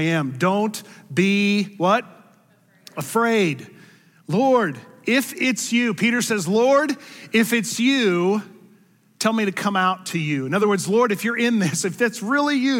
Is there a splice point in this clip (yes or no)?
no